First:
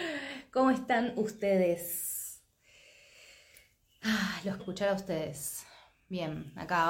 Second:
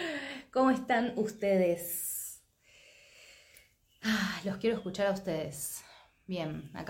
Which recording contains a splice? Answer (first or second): first